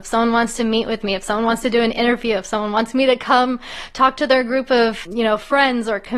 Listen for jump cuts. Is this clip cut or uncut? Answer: uncut